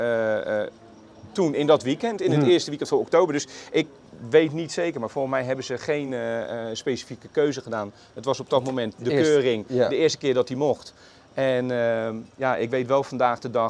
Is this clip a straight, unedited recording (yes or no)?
yes